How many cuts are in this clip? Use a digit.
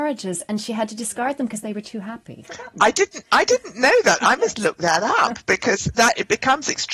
1